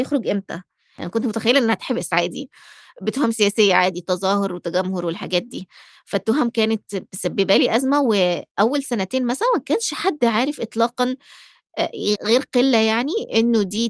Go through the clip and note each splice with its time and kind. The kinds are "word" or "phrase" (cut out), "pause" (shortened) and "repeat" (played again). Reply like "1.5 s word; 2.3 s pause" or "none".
12.2 s word